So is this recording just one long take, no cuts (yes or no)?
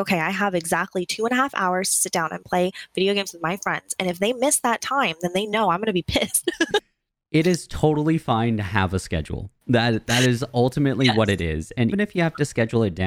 no